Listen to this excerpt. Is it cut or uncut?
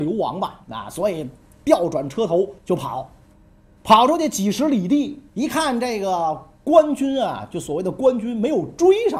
cut